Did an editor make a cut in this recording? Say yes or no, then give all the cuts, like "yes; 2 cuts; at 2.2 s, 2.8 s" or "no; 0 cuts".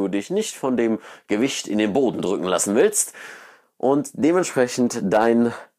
no; 0 cuts